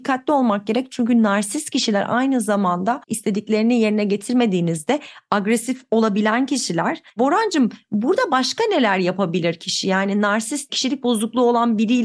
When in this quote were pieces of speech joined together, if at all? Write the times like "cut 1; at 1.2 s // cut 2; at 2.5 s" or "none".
cut 1; at 3.0 s // cut 2; at 7.1 s

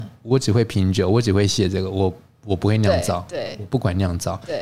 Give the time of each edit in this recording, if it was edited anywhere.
none

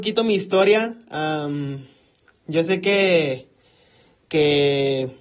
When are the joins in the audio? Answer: none

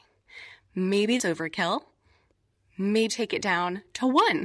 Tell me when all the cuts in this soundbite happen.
cut 1; at 1.2 s // cut 2; at 3.1 s

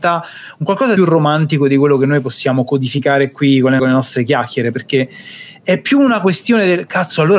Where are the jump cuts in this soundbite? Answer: cut 1; at 1.0 s // cut 2; at 3.8 s

